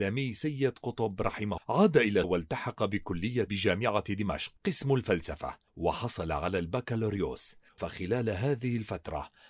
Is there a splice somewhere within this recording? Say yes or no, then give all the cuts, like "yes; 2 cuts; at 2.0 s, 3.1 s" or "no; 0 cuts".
yes; 6 cuts; at 1.6 s, 2.2 s, 3.5 s, 4.6 s, 5.7 s, 7.8 s